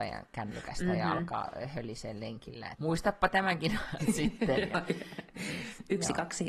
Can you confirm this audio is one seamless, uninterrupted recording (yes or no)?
no